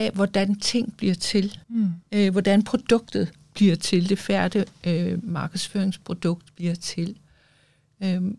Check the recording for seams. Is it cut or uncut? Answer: cut